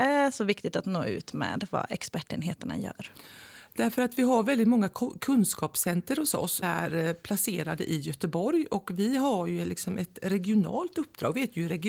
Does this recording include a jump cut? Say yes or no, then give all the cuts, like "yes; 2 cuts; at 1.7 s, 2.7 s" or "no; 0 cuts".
yes; 1 cut; at 6.6 s